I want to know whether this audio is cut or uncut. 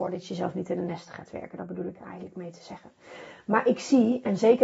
uncut